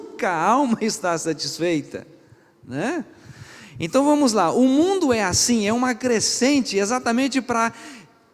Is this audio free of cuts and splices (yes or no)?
yes